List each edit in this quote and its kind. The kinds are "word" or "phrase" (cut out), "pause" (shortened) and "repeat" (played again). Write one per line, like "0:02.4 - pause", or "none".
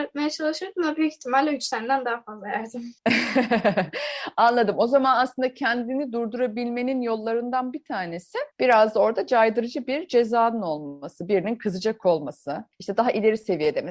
0:03.0 - pause
0:08.5 - pause
0:12.7 - pause